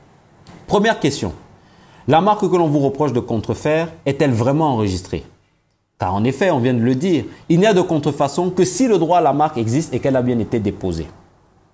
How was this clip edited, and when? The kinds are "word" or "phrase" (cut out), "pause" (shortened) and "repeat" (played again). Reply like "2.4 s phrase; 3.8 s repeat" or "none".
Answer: none